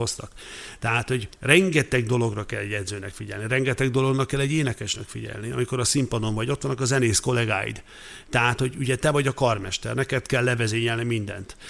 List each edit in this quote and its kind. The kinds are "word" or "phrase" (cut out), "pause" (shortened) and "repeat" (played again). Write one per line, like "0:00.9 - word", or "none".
0:01.3 - pause